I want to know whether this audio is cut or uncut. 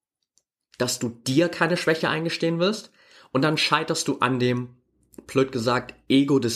uncut